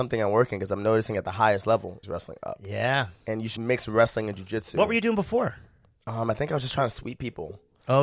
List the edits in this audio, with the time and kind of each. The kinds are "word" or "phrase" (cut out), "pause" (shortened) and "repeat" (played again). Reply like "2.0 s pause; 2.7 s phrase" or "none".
2.0 s word; 3.6 s word